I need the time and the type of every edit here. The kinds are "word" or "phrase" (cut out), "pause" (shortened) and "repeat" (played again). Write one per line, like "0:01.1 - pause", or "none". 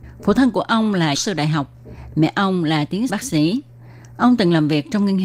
0:01.1 - word
0:03.1 - word